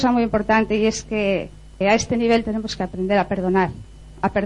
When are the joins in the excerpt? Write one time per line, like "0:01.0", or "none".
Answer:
0:01.8